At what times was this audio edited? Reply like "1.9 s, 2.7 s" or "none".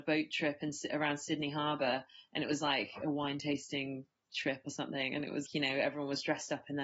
5.5 s